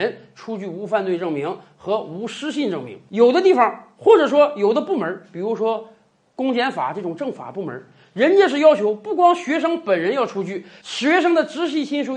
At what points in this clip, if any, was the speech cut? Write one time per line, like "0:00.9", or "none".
none